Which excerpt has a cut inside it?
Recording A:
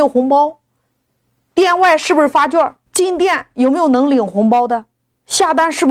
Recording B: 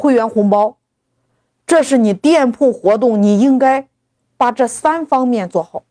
A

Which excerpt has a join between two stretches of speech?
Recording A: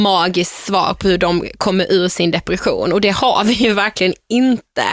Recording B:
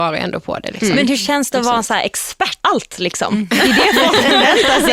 B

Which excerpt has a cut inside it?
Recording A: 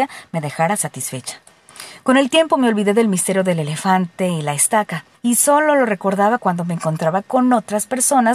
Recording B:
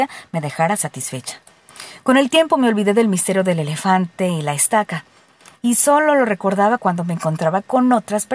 A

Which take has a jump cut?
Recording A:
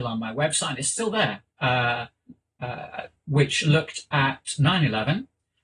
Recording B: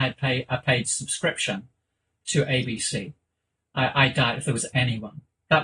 A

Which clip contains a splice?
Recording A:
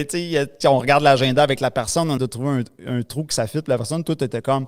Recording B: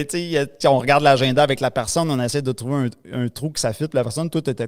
A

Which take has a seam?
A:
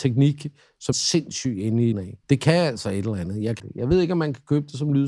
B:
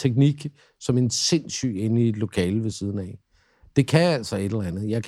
A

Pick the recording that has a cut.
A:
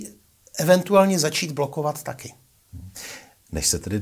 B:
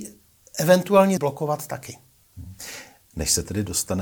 B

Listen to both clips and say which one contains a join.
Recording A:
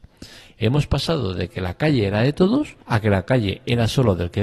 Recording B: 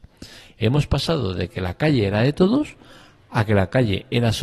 A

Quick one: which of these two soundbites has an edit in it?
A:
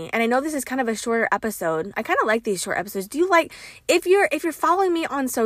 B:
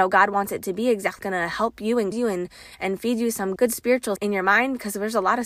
B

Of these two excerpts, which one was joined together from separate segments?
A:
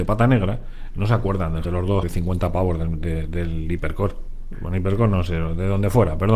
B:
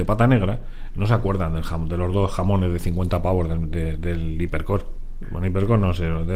A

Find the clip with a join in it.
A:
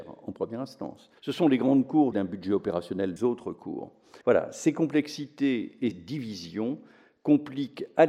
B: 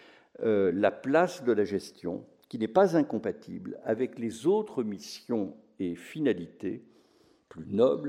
A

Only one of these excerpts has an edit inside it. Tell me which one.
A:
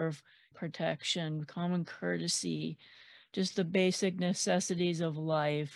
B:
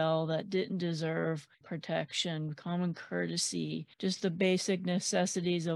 B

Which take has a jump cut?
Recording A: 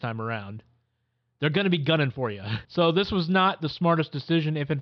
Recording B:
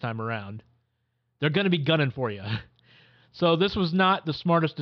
A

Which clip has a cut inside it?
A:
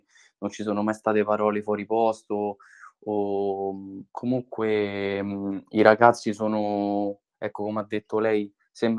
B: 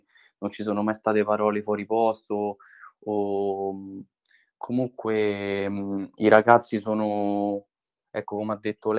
A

